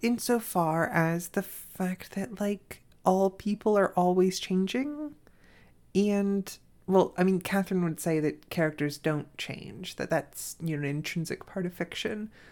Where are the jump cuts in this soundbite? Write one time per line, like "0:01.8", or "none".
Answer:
none